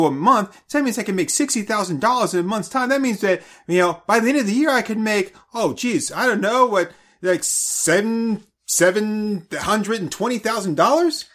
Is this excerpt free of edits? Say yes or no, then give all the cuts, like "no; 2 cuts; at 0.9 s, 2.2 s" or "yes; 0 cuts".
yes; 0 cuts